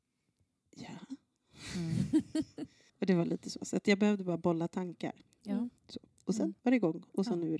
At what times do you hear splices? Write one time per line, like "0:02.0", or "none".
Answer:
0:02.9
0:05.8
0:06.6